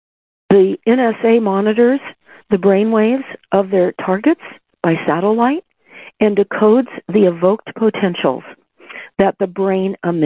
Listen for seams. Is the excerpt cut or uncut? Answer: uncut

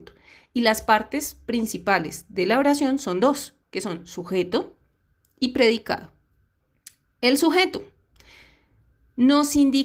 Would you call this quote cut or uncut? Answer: uncut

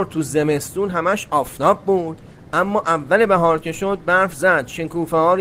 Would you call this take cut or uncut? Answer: uncut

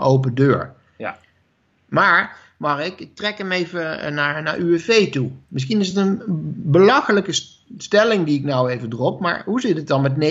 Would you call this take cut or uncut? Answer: uncut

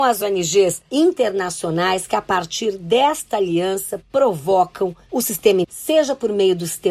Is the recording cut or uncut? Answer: cut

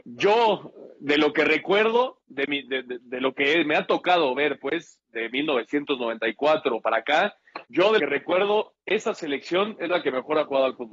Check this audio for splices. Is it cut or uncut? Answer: cut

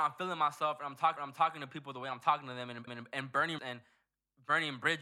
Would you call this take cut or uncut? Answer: cut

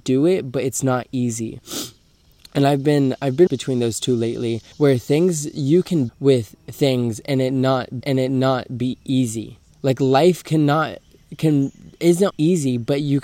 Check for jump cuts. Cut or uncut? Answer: cut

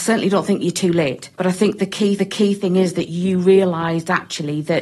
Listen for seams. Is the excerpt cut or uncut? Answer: cut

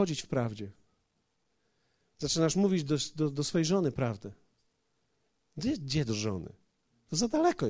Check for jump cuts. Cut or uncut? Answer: uncut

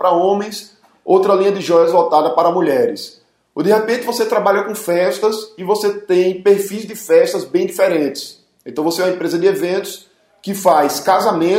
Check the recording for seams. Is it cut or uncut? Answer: uncut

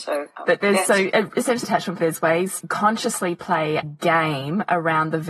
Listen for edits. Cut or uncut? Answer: cut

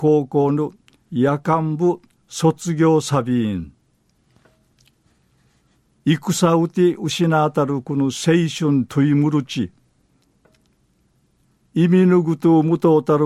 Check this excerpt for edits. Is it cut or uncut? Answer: uncut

